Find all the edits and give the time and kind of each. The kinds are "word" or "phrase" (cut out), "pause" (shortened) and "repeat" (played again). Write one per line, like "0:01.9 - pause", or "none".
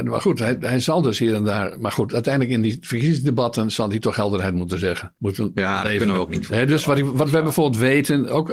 0:05.2 - pause